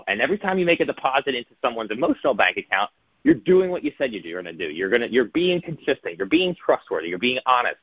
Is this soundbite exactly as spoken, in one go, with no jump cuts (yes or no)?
yes